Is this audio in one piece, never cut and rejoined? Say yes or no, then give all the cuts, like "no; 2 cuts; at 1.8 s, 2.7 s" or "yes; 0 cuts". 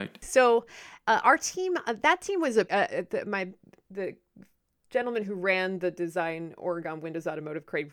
no; 1 cut; at 2.7 s